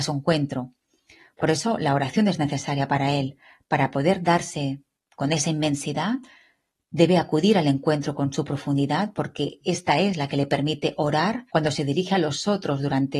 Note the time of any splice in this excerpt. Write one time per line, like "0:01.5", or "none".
0:11.5